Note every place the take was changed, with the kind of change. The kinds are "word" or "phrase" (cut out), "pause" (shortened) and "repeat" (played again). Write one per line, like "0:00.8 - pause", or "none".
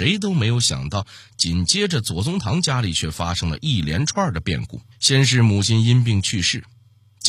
0:04.9 - pause